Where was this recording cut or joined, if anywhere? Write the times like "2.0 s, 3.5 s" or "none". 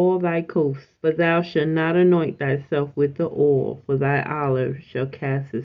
1.0 s